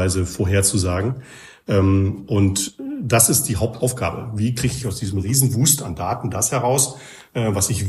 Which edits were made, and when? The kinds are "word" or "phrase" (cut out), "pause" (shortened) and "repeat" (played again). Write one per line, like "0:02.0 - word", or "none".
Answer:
none